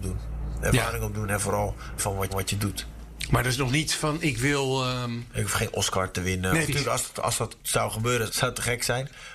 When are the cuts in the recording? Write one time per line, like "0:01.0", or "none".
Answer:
0:02.0
0:02.3
0:06.7
0:07.6
0:08.3

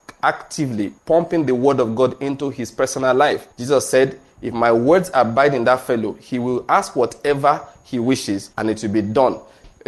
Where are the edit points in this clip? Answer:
0:01.0
0:03.5
0:08.5

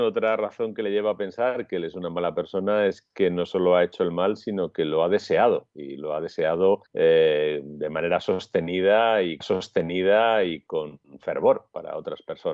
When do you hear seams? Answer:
0:06.9
0:09.4

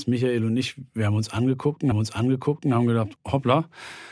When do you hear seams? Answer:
0:01.9
0:03.2

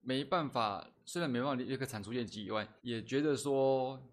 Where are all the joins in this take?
0:02.8

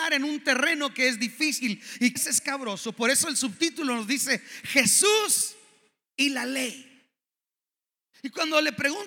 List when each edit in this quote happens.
0:02.2

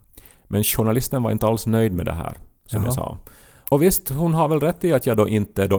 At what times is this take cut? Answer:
none

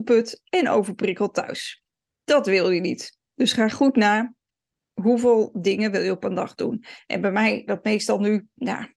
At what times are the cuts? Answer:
0:07.7

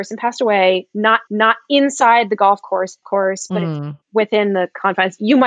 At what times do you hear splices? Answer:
0:01.3
0:03.0

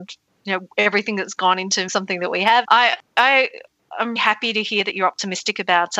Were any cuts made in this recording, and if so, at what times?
0:01.9
0:02.6
0:04.2

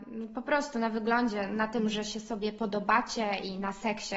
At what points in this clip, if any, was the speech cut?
0:01.5

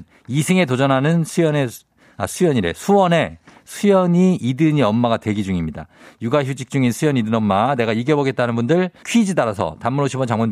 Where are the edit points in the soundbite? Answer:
0:09.0

